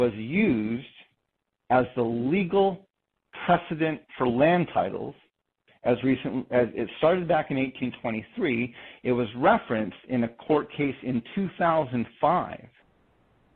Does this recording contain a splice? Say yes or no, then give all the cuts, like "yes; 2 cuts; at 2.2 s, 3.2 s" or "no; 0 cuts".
no; 0 cuts